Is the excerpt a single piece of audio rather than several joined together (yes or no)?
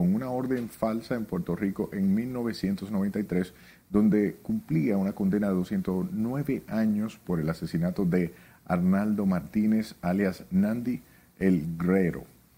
yes